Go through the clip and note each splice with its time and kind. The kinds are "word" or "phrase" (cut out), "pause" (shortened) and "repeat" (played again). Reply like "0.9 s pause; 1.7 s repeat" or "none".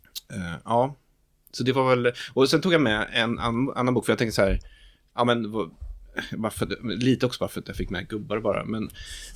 none